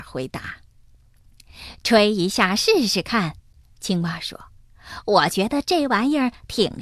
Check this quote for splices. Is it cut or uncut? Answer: cut